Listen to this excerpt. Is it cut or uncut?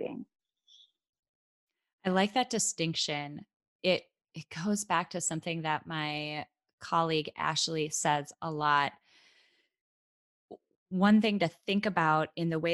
uncut